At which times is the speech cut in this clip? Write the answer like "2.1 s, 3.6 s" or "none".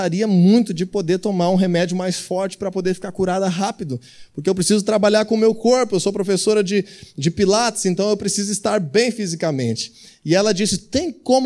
none